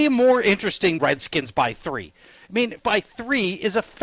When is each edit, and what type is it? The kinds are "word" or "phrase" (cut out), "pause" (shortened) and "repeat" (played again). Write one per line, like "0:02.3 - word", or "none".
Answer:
0:01.0 - word
0:02.8 - word